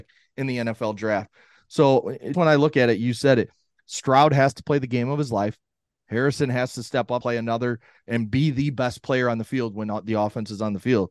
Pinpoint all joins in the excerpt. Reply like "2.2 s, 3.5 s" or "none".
2.3 s, 7.2 s